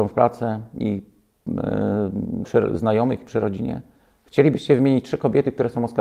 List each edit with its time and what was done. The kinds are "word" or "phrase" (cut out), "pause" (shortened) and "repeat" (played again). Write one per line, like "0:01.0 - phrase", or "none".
0:02.4 - word